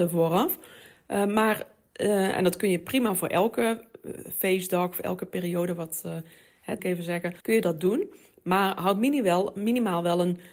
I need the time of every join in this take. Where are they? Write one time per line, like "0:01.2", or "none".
0:06.8
0:07.4